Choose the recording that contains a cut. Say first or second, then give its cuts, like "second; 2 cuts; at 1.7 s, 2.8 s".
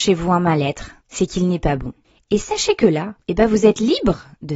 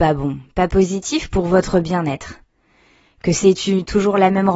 first; 3 cuts; at 1.0 s, 2.0 s, 3.2 s